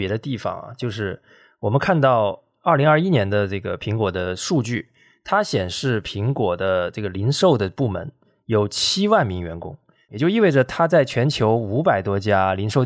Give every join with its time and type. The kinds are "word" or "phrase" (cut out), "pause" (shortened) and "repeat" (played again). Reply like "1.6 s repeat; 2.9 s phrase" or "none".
none